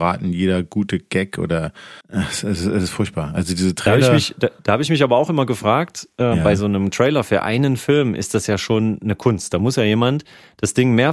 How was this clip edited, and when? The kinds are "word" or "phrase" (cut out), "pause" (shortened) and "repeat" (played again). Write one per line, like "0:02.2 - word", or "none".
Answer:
0:02.0 - pause
0:04.6 - pause